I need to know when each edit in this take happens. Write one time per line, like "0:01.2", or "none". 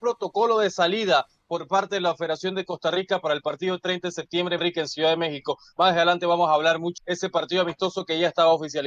0:04.6
0:07.0